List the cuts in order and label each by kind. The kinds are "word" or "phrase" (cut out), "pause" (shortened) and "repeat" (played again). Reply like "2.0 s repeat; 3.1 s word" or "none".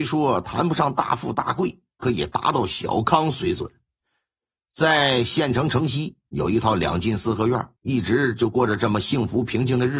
7.8 s pause